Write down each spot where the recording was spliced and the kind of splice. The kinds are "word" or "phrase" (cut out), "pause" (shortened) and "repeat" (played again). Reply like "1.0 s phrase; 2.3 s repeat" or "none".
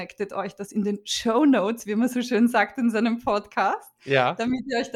none